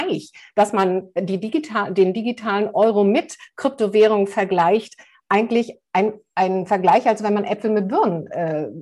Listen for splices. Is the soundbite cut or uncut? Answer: uncut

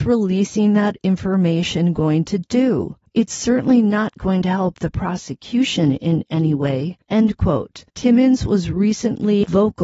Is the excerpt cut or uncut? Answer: cut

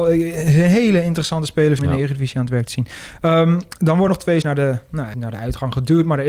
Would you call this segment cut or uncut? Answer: cut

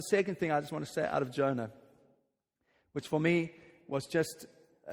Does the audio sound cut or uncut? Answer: uncut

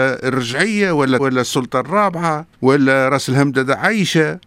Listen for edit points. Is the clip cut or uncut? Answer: cut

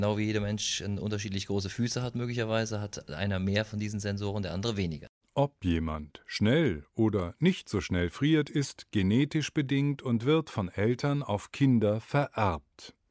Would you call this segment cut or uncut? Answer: cut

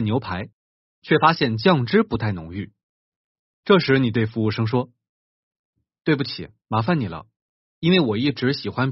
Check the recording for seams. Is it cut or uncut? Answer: uncut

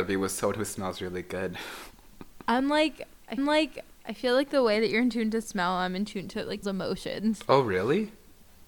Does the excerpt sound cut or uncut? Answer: cut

